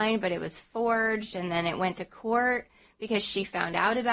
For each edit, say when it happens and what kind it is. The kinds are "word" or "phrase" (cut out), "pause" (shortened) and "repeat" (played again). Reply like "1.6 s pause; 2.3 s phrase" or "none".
none